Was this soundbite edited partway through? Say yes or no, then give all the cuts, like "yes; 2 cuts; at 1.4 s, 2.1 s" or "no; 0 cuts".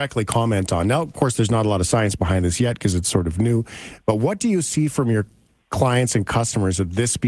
no; 0 cuts